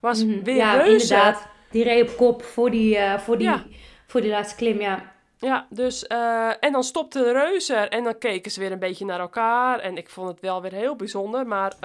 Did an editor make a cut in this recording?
no; 0 cuts

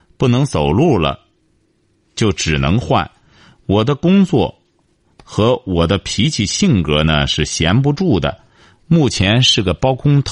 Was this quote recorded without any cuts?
yes; 0 cuts

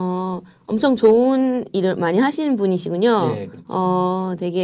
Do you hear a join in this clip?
no; 0 cuts

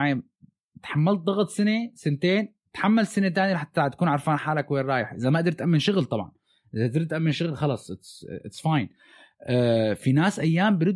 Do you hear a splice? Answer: no; 0 cuts

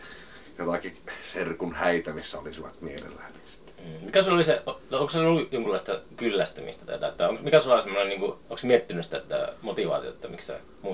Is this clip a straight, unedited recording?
no; 2 cuts; at 6.1 s, 8.4 s

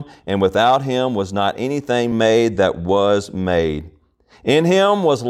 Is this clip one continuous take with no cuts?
yes; 0 cuts

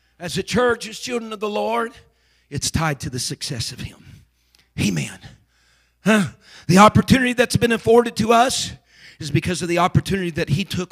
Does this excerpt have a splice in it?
no; 0 cuts

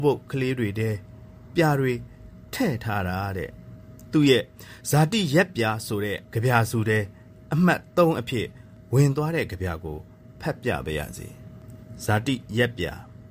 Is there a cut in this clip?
yes; 1 cut; at 6.2 s

